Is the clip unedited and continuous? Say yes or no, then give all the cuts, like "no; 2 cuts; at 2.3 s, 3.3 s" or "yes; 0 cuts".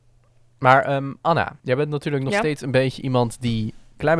no; 1 cut; at 1.6 s